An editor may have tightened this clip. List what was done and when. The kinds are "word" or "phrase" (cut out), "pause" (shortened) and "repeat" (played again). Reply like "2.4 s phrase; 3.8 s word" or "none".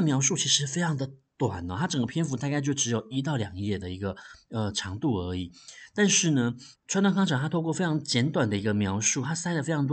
6.7 s word